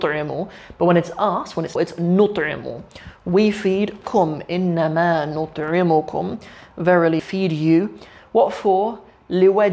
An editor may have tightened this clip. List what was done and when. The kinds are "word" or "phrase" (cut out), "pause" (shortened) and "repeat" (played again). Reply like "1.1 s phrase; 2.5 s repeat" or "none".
1.8 s word; 7.2 s word